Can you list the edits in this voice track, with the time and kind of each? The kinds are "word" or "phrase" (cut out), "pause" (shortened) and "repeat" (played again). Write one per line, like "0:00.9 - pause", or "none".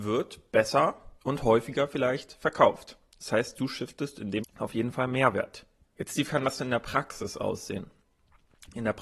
0:01.2 - pause
0:04.4 - word
0:05.8 - pause
0:06.3 - phrase